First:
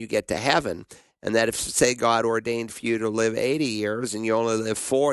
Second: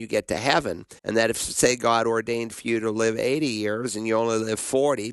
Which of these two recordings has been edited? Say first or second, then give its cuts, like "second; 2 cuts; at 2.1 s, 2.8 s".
second; 1 cut; at 1.0 s